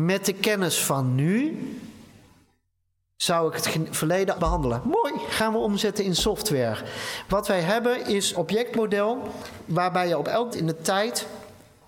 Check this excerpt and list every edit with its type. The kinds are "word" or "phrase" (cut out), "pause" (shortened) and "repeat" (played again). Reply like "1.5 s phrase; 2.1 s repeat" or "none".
4.4 s word; 8.3 s word; 10.5 s word